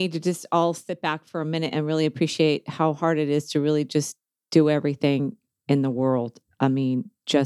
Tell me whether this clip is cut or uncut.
uncut